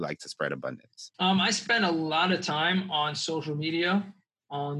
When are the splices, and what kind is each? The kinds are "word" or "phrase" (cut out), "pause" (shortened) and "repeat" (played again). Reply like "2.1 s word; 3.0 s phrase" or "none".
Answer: 1.1 s pause